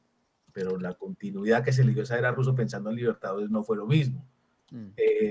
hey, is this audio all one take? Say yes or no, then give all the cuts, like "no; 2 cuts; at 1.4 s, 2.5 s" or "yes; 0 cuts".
yes; 0 cuts